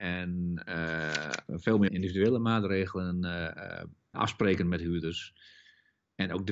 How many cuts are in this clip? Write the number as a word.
two